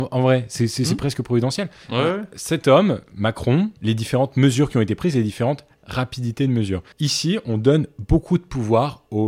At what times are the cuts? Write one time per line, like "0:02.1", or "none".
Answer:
0:03.8
0:06.9